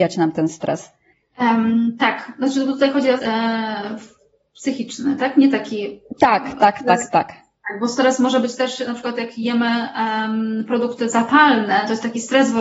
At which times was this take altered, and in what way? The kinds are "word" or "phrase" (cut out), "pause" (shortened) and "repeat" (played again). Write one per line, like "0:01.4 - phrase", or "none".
0:03.2 - phrase